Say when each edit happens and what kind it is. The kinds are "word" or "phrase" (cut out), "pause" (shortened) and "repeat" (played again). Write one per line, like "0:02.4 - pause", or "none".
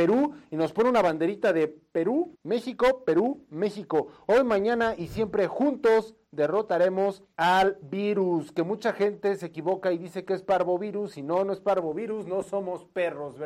0:02.3 - pause
0:07.3 - pause